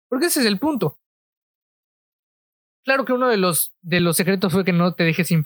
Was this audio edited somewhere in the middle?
no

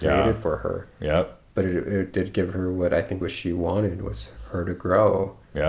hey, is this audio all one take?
no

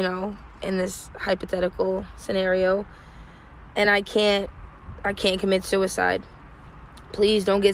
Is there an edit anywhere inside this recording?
no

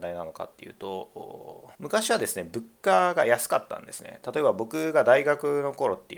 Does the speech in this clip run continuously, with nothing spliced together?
no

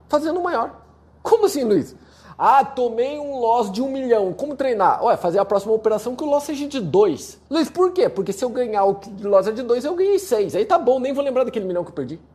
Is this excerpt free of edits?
no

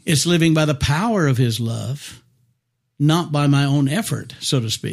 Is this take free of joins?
yes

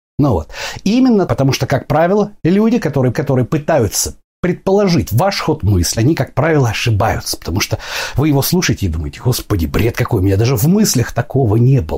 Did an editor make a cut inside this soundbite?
yes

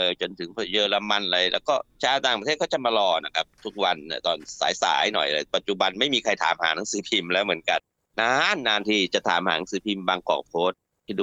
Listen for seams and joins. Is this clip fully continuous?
no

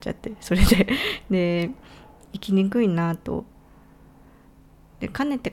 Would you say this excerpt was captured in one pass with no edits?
yes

